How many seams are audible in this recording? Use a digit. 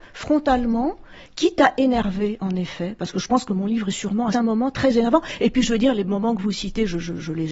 1